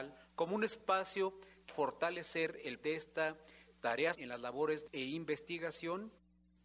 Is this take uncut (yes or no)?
no